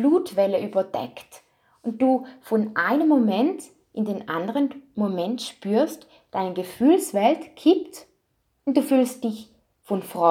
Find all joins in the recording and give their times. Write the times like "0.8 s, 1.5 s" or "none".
none